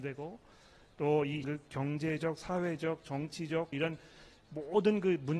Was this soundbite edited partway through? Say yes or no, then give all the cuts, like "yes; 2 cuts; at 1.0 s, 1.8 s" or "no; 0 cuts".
yes; 2 cuts; at 1.4 s, 3.7 s